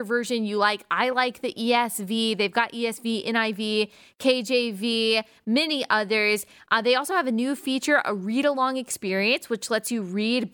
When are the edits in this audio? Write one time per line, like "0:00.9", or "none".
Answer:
none

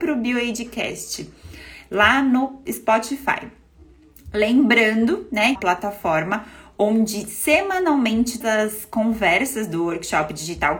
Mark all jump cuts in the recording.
0:05.6
0:08.4

